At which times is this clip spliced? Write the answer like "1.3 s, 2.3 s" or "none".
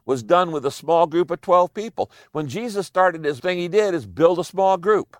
3.4 s